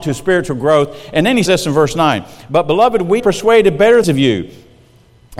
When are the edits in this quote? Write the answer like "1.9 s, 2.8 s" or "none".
1.5 s, 3.2 s, 4.0 s